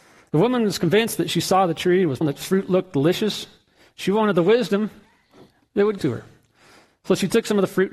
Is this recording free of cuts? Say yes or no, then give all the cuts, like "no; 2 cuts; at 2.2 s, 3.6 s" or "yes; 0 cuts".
no; 2 cuts; at 2.2 s, 6.0 s